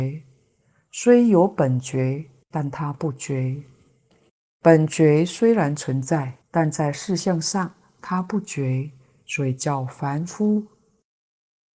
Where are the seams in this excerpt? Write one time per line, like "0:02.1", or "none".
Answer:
0:06.4